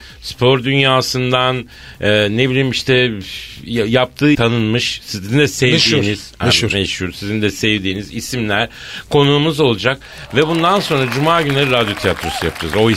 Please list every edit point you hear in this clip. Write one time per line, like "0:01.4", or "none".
0:04.3